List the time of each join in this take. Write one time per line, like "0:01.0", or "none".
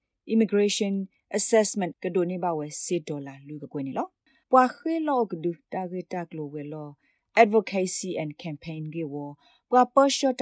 0:01.9
0:04.4